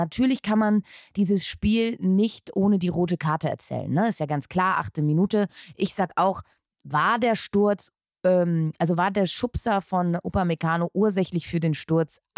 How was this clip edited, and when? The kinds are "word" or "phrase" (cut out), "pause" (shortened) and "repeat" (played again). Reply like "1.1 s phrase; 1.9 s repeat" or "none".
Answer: none